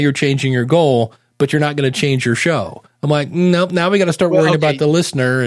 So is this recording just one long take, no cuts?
yes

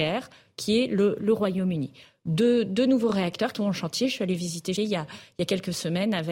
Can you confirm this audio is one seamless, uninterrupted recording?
no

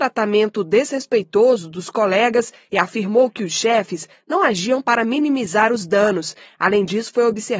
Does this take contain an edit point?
no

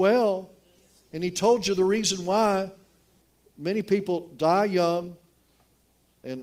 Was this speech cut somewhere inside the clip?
no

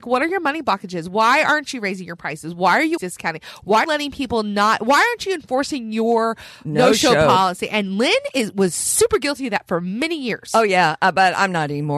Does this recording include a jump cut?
yes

